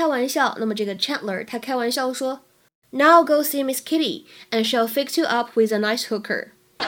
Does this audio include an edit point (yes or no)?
no